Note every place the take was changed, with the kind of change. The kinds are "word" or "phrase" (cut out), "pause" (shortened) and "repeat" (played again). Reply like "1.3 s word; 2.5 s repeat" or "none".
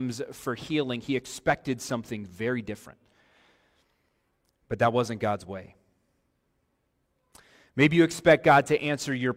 none